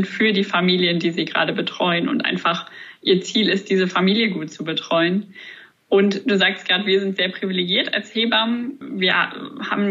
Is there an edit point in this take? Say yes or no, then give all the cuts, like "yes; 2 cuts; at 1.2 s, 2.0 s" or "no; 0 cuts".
no; 0 cuts